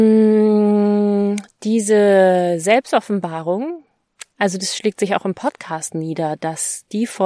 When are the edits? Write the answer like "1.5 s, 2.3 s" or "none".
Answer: none